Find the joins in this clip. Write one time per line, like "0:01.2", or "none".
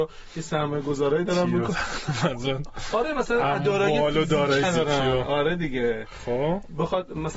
0:04.6